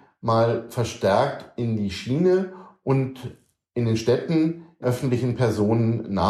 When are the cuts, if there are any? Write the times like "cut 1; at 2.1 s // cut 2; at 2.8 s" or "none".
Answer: cut 1; at 4.8 s